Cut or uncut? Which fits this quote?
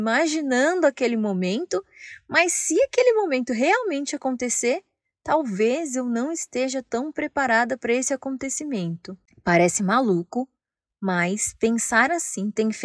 uncut